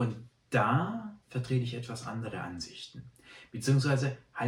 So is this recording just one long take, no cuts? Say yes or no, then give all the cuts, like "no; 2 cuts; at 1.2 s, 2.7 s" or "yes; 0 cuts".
no; 1 cut; at 1.2 s